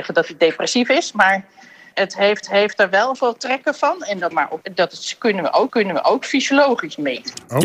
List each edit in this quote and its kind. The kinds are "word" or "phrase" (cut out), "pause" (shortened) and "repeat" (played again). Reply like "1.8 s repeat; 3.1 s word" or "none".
1.9 s word; 2.4 s repeat; 3.1 s word; 4.3 s phrase; 4.6 s word; 5.7 s repeat